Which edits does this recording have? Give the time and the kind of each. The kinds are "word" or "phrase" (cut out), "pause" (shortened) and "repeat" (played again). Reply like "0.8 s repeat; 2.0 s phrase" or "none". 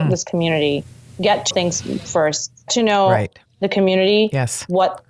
1.5 s word; 2.7 s word

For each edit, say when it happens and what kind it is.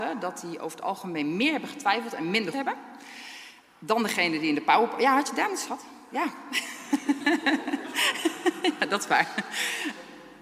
2.5 s word; 5.7 s word

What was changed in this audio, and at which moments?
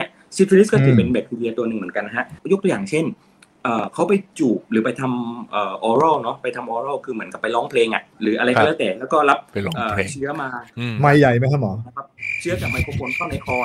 8.1 s pause

